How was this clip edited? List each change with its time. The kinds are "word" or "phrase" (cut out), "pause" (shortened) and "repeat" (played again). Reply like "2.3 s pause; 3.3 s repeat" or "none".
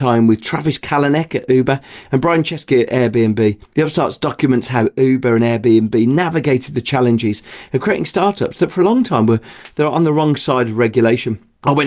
3.6 s pause